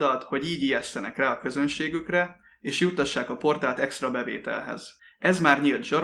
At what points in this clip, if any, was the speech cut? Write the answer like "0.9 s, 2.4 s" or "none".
none